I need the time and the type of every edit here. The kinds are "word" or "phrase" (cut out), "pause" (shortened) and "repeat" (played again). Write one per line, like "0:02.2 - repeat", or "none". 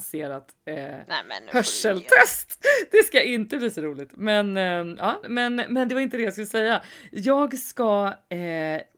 0:05.2 - word